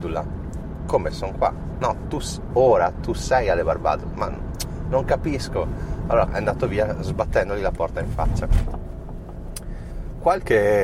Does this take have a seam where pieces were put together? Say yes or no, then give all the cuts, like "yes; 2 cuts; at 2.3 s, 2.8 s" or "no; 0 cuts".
yes; 3 cuts; at 1.1 s, 1.8 s, 6.3 s